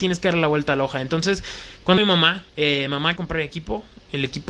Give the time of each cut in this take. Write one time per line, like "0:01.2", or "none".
0:02.0
0:02.5
0:03.2